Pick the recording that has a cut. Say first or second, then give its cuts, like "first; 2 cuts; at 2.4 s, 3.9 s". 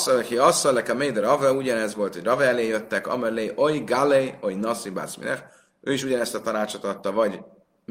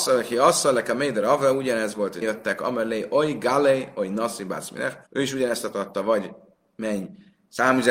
second; 3 cuts; at 2.2 s, 5.1 s, 5.7 s